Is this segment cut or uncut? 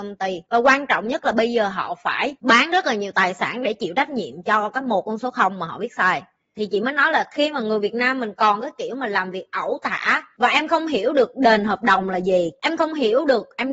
uncut